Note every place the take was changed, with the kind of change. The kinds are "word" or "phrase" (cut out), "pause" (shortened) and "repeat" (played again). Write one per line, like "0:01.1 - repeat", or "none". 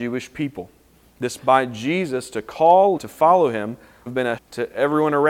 0:01.4 - word
0:03.0 - word
0:04.1 - word
0:04.4 - word